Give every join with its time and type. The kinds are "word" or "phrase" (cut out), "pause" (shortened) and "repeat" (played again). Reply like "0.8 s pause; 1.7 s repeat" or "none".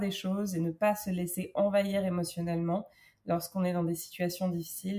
none